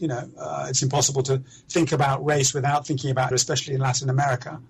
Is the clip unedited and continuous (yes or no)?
no